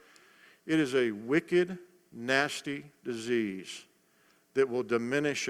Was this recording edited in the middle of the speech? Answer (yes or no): no